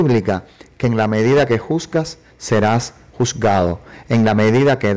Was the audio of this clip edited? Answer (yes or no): no